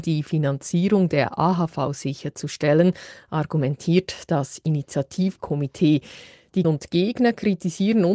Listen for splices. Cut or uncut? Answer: cut